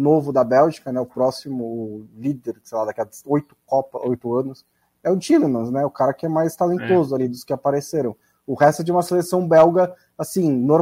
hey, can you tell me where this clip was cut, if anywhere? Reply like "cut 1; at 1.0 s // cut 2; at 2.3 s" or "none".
none

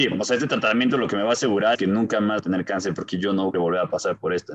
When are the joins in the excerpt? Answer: cut 1; at 1.7 s // cut 2; at 2.4 s // cut 3; at 3.5 s

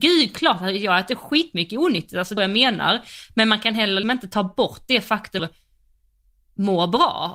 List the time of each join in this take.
cut 1; at 2.4 s // cut 2; at 4.0 s // cut 3; at 5.4 s

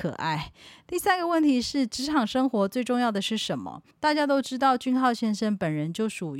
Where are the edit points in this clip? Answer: cut 1; at 3.9 s

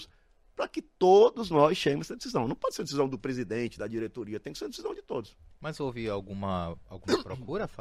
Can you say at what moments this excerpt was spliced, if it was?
none

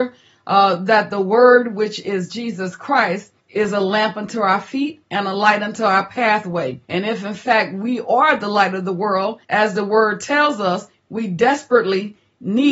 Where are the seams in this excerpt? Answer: cut 1; at 3.4 s // cut 2; at 6.8 s // cut 3; at 9.4 s

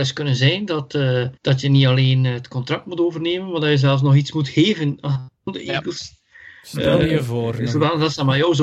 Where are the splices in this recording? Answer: cut 1; at 1.4 s // cut 2; at 5.4 s

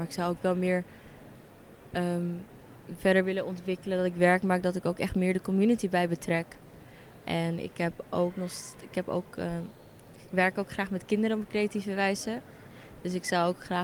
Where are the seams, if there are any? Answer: none

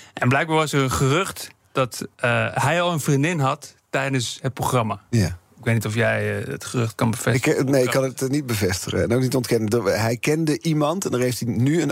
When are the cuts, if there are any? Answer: cut 1; at 2.1 s

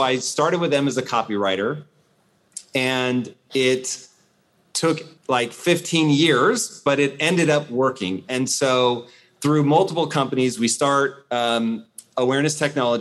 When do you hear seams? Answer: cut 1; at 5.2 s

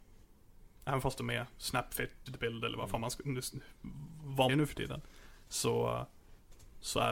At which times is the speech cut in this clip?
cut 1; at 2.3 s // cut 2; at 4.5 s

